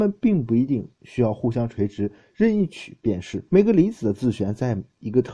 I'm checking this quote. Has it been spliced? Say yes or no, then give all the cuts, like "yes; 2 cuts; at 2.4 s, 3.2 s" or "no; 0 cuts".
yes; 2 cuts; at 0.9 s, 3.5 s